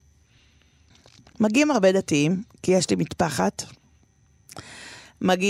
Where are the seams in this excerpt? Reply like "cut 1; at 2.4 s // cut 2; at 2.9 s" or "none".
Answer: none